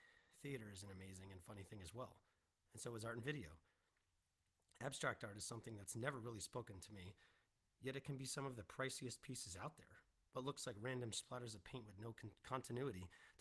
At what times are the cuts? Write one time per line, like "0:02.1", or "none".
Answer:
none

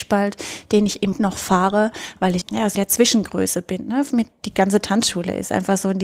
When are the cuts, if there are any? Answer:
0:01.1
0:02.4
0:02.7

